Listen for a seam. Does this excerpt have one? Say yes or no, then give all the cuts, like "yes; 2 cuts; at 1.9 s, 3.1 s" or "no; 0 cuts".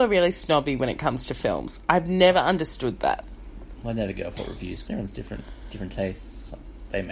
yes; 1 cut; at 4.8 s